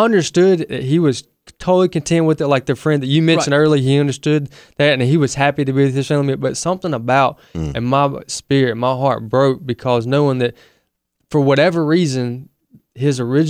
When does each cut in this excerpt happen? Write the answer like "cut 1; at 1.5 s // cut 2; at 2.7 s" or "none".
none